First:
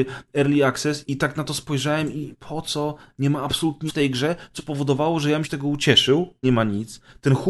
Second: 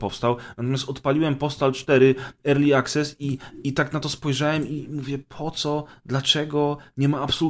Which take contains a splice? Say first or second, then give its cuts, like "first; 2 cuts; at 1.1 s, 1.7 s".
first; 7 cuts; at 1.1 s, 2.3 s, 3.1 s, 3.9 s, 4.6 s, 5.4 s, 6.4 s